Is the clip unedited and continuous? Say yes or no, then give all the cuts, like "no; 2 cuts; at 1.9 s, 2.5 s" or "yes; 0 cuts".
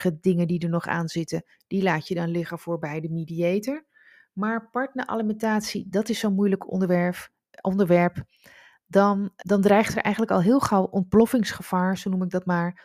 no; 1 cut; at 9.4 s